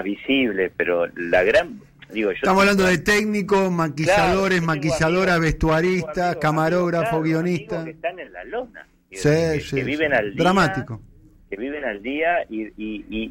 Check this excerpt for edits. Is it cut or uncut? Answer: uncut